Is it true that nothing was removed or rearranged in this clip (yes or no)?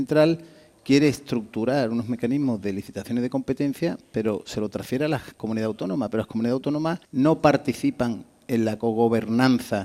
no